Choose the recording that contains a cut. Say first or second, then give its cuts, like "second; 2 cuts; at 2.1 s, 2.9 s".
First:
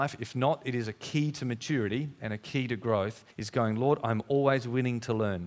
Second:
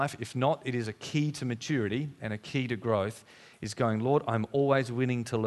first; 1 cut; at 3.3 s